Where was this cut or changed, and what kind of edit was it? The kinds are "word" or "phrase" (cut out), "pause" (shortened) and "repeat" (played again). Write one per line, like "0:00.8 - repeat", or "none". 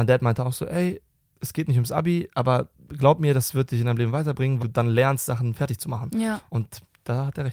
0:04.6 - word